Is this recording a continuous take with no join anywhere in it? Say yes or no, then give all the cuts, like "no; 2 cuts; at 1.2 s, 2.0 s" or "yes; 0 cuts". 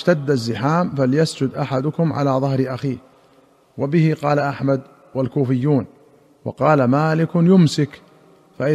yes; 0 cuts